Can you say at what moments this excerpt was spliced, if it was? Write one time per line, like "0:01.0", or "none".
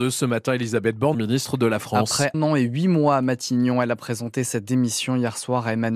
0:01.1
0:02.3